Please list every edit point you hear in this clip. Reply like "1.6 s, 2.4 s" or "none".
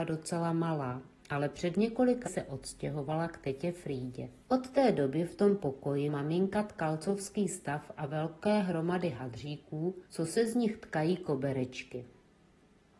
2.3 s, 4.4 s, 6.1 s, 10.1 s